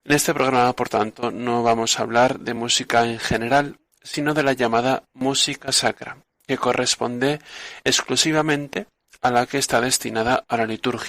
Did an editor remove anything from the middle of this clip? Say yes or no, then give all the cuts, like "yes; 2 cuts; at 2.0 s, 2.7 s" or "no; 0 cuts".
no; 0 cuts